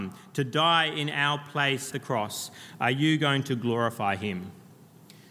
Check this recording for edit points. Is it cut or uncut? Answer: cut